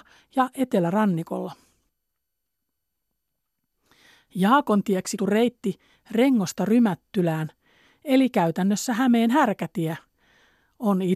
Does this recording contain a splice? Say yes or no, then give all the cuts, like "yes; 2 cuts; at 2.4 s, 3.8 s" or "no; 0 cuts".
yes; 1 cut; at 5.2 s